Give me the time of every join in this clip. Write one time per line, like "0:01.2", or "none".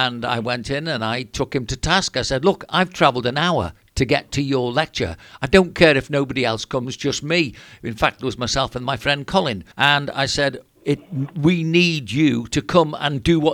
0:09.7